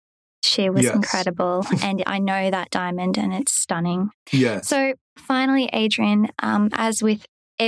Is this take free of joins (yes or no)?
yes